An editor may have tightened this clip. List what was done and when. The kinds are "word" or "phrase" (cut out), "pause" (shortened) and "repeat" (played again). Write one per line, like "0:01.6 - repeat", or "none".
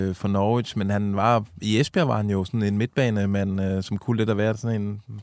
none